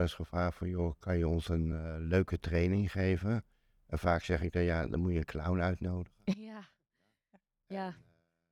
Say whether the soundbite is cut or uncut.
uncut